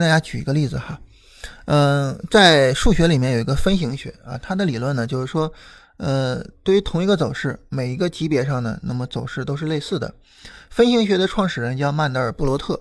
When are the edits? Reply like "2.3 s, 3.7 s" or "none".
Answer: none